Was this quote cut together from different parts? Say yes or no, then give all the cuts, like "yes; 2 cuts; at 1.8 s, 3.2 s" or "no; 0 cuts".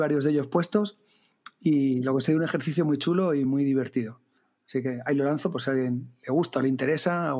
no; 0 cuts